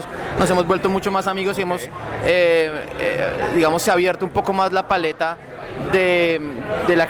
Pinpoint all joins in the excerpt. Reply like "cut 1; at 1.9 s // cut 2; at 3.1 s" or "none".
none